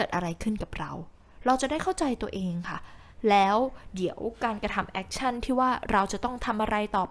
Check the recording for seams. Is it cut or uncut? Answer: uncut